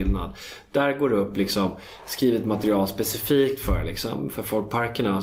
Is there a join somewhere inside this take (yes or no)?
no